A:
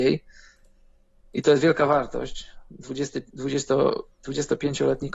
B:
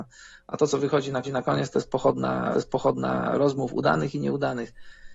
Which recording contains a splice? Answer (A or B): B